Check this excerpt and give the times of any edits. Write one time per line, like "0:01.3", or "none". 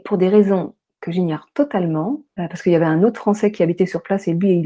0:02.3